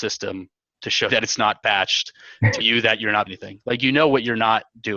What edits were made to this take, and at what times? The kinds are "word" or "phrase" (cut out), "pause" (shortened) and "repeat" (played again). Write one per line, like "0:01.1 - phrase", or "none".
0:01.1 - word
0:02.6 - word
0:03.3 - word